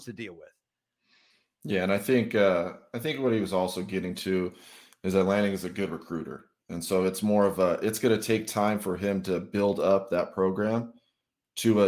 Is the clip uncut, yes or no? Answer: yes